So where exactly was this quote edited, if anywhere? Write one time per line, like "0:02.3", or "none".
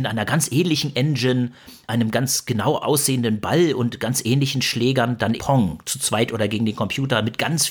0:01.8
0:02.8
0:05.4